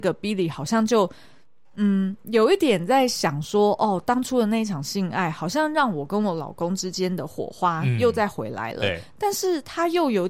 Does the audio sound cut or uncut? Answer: uncut